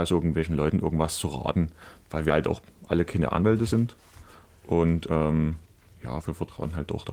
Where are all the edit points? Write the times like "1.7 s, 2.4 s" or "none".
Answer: none